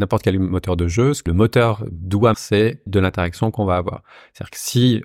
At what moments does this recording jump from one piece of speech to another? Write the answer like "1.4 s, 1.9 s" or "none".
1.3 s, 2.3 s, 2.9 s